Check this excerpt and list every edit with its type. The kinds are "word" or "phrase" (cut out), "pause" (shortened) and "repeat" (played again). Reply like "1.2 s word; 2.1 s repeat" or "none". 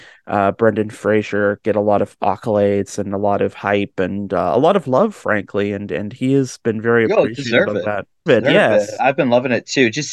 8.3 s word